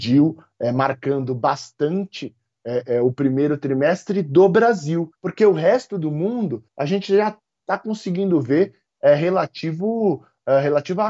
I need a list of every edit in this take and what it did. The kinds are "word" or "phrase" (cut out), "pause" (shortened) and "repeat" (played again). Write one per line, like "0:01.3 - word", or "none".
0:05.1 - pause
0:06.7 - pause